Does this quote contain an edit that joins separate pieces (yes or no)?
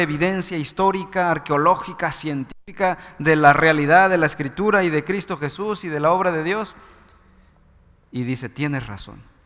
no